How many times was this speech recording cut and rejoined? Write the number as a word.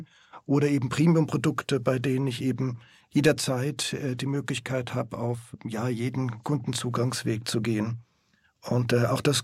zero